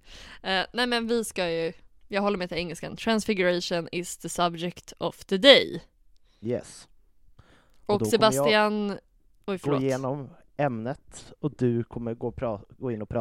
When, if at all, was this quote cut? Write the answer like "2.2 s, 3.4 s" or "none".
none